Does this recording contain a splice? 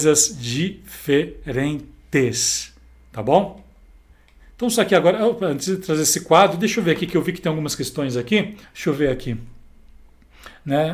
yes; 2 cuts; at 4.1 s, 8.6 s

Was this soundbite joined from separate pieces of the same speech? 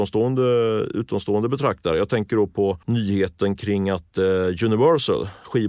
yes; 1 cut; at 2.8 s

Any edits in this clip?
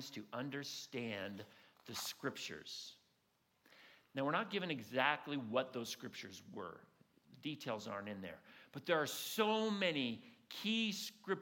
no; 0 cuts

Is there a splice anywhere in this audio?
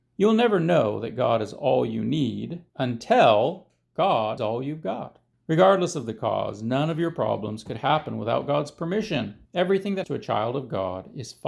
yes; 5 cuts; at 2.7 s, 4.4 s, 5.3 s, 9.5 s, 10.0 s

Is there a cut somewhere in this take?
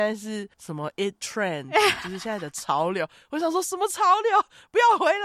no; 0 cuts

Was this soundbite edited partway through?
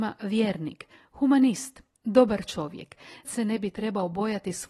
yes; 1 cut; at 3.2 s

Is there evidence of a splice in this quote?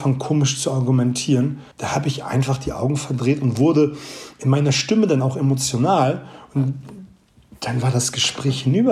yes; 1 cut; at 1.7 s

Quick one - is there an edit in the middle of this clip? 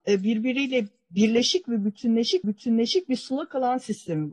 yes; 1 cut; at 2.4 s

